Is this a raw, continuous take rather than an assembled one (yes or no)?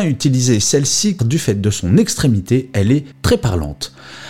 no